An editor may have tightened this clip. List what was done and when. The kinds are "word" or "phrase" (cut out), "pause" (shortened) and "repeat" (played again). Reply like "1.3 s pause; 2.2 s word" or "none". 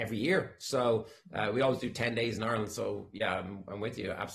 none